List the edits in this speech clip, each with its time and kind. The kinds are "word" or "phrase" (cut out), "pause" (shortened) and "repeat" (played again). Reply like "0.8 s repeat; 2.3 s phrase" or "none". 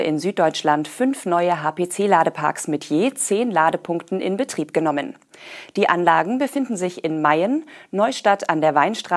none